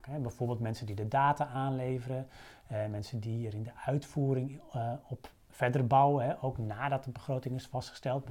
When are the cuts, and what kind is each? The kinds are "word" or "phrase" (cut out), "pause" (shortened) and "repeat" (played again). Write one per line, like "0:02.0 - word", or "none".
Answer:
none